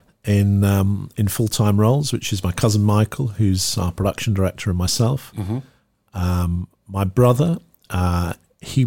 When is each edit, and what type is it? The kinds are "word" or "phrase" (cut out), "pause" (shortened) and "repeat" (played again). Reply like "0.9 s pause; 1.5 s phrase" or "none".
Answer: none